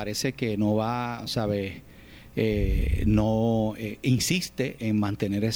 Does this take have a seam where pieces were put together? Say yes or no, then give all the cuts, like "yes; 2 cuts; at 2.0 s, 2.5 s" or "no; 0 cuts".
no; 0 cuts